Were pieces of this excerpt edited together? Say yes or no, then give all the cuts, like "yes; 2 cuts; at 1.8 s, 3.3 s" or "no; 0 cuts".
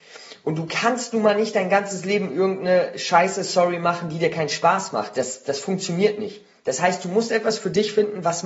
no; 0 cuts